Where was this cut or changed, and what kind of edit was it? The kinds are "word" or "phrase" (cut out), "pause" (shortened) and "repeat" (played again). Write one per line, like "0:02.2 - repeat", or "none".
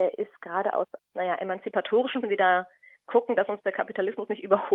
0:01.0 - word
0:02.2 - phrase